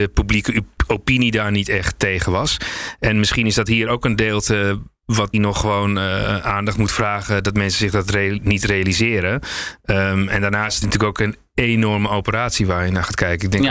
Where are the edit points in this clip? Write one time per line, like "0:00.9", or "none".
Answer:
0:05.3
0:10.8